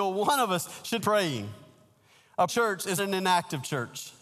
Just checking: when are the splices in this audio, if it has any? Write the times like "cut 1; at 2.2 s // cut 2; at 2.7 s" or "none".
cut 1; at 1.0 s // cut 2; at 2.5 s // cut 3; at 3.0 s